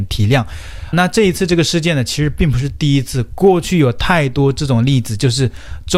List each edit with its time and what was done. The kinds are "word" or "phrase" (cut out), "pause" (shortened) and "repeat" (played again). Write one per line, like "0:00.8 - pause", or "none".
0:00.9 - word

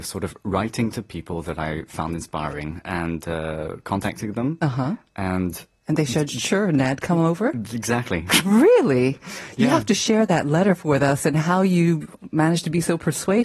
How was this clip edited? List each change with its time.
none

